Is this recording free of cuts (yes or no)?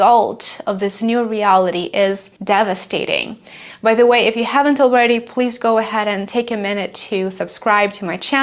no